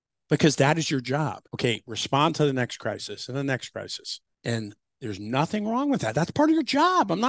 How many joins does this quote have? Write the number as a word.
two